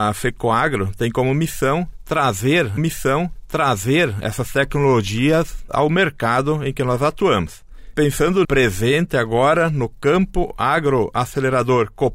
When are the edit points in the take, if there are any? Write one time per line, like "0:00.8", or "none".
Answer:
0:02.8
0:05.7
0:08.4